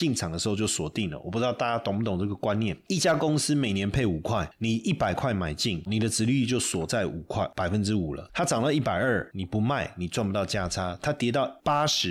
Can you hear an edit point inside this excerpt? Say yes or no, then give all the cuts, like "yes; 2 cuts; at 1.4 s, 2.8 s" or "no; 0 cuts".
yes; 1 cut; at 5.9 s